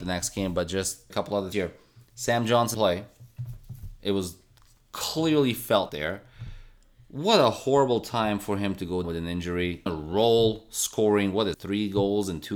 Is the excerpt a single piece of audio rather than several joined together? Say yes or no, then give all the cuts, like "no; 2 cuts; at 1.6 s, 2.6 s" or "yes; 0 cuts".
no; 7 cuts; at 1.1 s, 1.5 s, 2.7 s, 5.9 s, 9.0 s, 9.9 s, 11.5 s